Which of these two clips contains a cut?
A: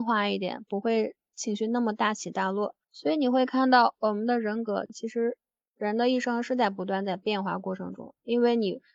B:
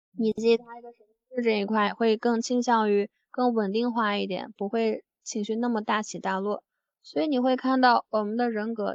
A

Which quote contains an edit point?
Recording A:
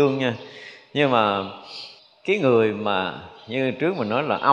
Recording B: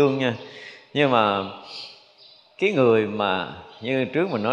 A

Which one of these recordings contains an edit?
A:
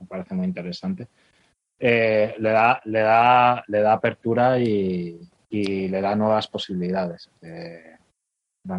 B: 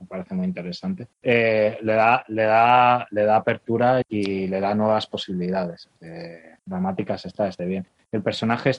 B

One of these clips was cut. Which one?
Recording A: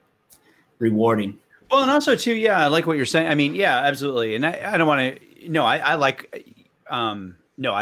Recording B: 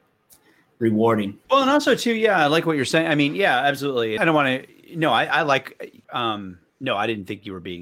B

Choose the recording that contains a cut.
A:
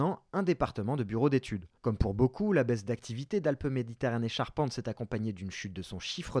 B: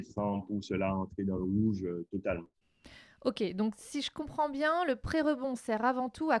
A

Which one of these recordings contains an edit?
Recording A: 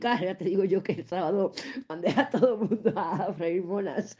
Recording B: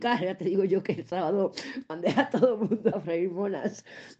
B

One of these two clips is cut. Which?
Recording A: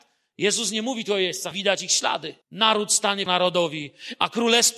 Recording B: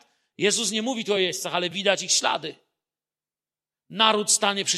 A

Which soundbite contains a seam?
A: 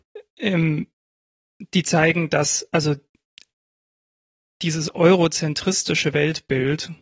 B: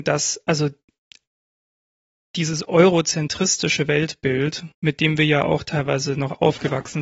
B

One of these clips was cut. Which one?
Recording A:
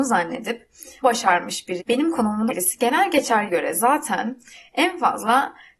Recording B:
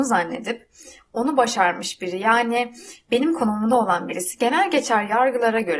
A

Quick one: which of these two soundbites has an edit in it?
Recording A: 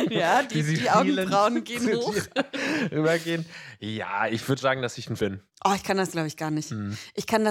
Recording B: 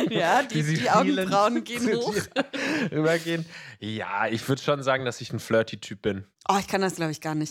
A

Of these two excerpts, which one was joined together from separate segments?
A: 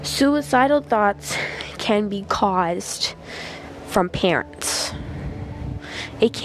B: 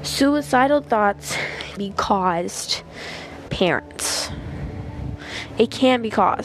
B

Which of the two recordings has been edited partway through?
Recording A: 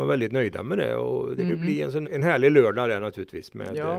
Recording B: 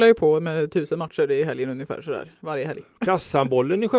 A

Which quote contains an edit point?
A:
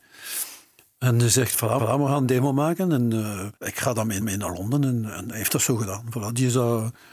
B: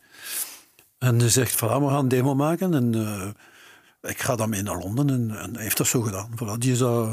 A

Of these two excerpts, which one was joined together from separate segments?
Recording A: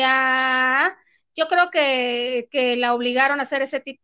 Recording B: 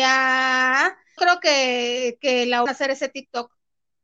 B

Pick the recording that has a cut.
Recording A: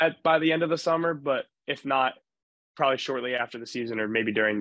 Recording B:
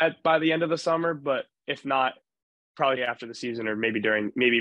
B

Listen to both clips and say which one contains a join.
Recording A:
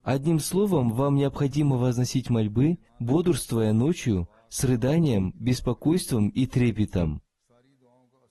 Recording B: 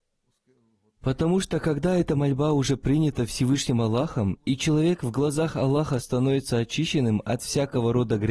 A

